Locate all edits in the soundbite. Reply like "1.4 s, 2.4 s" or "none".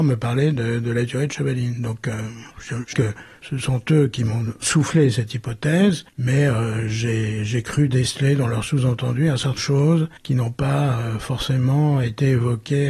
2.5 s, 2.9 s, 6.1 s, 9.6 s, 10.2 s